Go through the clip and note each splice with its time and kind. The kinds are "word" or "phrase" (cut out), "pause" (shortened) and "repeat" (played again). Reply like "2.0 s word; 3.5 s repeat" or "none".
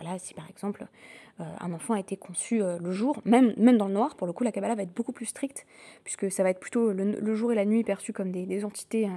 none